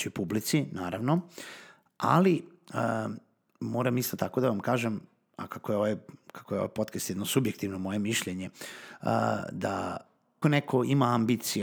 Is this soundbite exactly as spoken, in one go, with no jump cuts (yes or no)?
no